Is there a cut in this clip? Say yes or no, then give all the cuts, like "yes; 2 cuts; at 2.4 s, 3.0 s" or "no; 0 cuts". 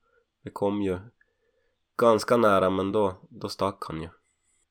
no; 0 cuts